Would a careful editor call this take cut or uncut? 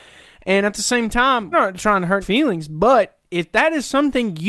cut